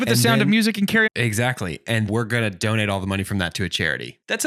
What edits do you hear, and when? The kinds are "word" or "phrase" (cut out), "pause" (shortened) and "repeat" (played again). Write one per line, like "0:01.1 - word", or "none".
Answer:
0:01.1 - word
0:02.1 - word